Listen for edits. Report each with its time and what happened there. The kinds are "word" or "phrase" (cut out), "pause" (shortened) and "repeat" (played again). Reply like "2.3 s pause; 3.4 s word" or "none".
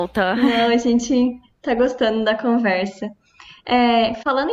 none